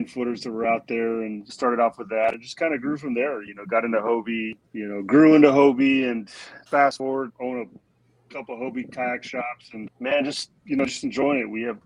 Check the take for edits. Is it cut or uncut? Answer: cut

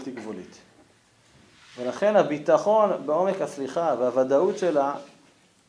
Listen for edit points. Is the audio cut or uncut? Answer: uncut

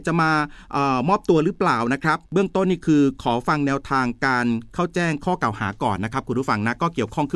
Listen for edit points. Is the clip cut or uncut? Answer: cut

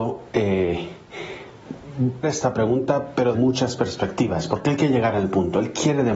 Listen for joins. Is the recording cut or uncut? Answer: cut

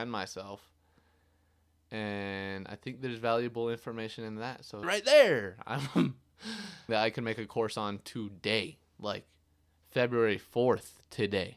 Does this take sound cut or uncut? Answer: cut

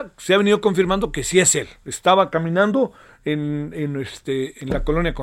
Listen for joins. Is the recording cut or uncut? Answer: uncut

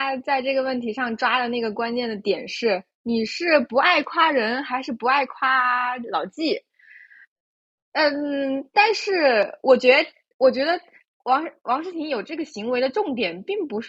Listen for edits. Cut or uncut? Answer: uncut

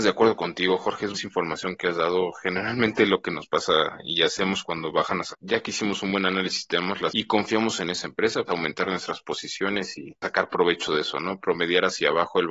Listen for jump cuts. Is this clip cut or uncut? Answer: cut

